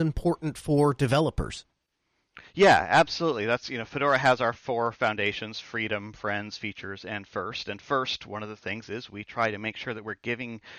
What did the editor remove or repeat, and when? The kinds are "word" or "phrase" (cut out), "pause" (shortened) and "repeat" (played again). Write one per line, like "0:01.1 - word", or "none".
none